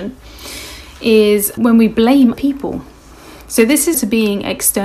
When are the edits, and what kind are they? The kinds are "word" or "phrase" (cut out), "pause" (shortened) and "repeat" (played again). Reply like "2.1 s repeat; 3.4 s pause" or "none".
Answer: 1.6 s word; 2.3 s word; 3.9 s word